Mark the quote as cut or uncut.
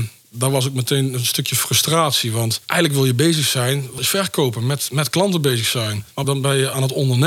cut